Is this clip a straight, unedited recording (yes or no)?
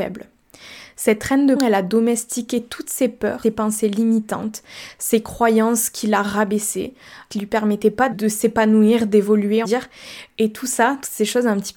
no